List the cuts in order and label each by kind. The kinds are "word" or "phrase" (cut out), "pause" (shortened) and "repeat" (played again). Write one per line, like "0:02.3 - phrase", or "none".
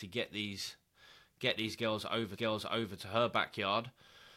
0:02.4 - repeat